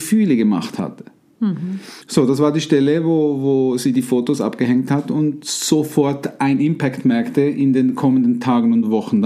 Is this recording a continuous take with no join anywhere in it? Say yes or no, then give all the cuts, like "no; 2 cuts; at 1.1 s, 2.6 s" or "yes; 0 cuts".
no; 1 cut; at 2.0 s